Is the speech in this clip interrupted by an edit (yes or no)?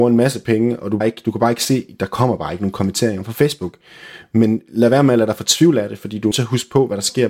yes